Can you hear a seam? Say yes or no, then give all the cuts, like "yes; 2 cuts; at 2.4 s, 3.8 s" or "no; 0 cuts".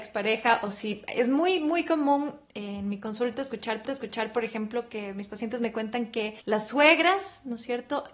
yes; 2 cuts; at 3.9 s, 6.4 s